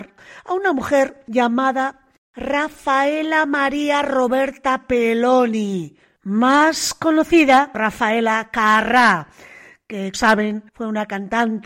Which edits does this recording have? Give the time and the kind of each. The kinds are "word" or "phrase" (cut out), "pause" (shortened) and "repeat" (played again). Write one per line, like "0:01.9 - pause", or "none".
0:07.7 - word
0:10.1 - word
0:10.7 - pause